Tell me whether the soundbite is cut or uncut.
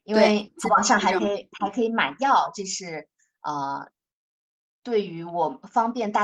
uncut